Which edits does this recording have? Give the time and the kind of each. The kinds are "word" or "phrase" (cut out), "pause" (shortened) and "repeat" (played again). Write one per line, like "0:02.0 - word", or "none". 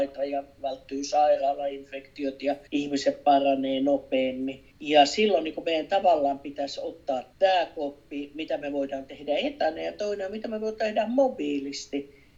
0:02.7 - pause
0:04.7 - pause
0:07.3 - word